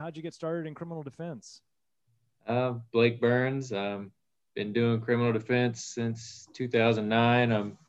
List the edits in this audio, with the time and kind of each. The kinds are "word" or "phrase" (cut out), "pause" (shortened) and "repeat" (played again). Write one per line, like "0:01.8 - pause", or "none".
none